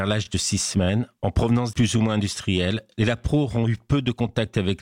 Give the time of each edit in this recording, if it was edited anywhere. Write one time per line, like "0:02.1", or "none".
0:01.7